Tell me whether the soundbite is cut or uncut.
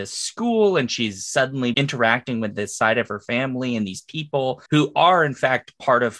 cut